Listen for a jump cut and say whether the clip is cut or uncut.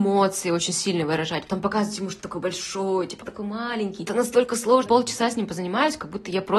cut